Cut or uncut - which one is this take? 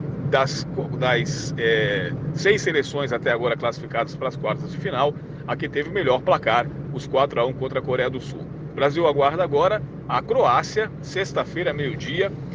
uncut